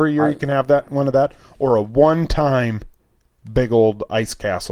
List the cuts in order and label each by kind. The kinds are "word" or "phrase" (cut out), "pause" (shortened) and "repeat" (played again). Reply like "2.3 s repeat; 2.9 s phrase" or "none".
3.0 s pause